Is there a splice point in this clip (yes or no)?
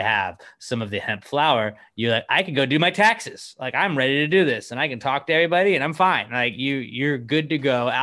no